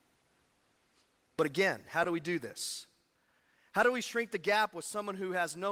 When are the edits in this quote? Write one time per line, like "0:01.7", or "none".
none